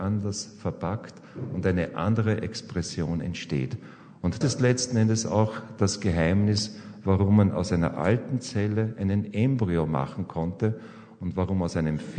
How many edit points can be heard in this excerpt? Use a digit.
1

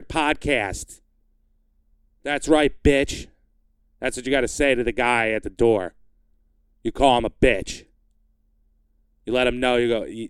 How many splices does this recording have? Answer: 0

